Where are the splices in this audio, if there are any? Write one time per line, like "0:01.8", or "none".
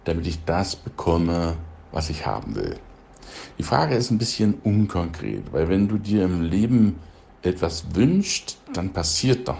0:07.3